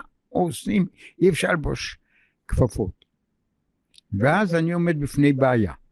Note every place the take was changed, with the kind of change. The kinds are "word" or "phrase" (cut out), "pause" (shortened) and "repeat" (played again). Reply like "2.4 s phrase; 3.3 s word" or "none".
none